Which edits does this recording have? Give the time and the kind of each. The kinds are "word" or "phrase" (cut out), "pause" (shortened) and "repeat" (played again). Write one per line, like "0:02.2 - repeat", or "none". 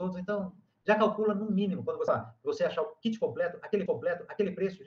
0:02.1 - word
0:03.9 - repeat